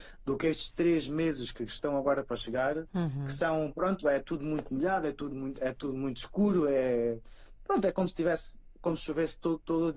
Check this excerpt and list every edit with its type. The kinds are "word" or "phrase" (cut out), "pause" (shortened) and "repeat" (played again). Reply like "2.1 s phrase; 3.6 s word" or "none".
none